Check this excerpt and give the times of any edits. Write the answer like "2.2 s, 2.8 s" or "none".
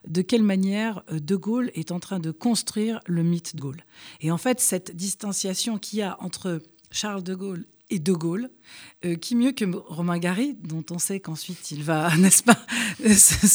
3.6 s